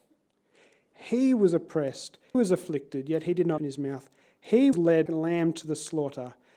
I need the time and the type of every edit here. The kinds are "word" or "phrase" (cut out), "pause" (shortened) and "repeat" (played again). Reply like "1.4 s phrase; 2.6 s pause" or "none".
2.3 s word; 3.6 s word; 4.7 s word; 5.1 s word